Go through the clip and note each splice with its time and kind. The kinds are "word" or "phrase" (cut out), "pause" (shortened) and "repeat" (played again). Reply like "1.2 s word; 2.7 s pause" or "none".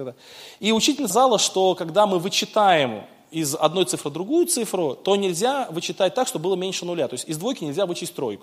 1.1 s word

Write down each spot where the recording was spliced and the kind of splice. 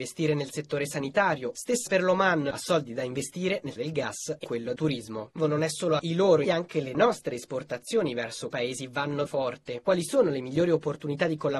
1.9 s word; 3.8 s word; 4.4 s word; 4.8 s word; 5.4 s word; 6.0 s word; 6.4 s word; 8.5 s word; 9.3 s word

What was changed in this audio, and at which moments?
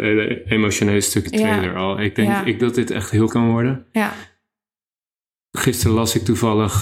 1.3 s word; 2.6 s word; 3.3 s word

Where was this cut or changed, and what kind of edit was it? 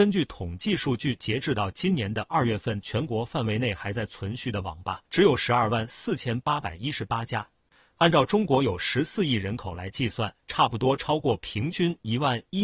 5.0 s pause

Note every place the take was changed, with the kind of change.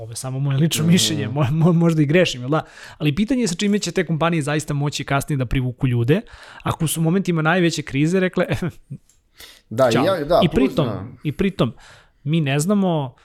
none

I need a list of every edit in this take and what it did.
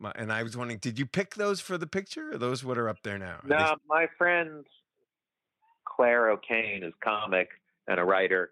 3.8 s word

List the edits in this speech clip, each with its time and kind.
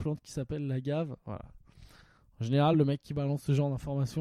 none

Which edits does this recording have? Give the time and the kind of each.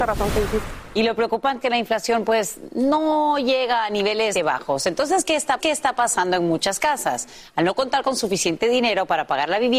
1.6 s word; 4.3 s word; 5.6 s repeat

